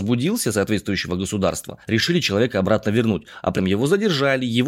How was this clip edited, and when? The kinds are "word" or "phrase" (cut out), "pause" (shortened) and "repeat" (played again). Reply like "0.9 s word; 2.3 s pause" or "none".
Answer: 1.8 s pause; 3.6 s word